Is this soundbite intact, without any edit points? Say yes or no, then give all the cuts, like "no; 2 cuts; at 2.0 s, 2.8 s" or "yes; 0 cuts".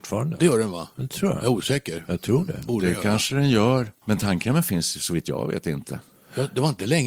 no; 1 cut; at 4.0 s